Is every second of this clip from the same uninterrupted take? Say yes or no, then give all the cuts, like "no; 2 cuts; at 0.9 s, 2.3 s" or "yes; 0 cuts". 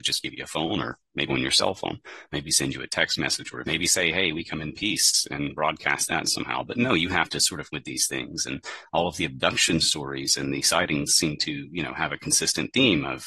no; 3 cuts; at 1.3 s, 3.6 s, 7.7 s